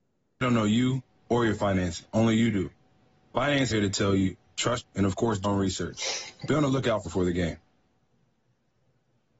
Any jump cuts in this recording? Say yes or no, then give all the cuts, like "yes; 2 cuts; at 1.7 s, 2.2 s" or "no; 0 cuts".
yes; 4 cuts; at 3.7 s, 4.8 s, 5.4 s, 7.0 s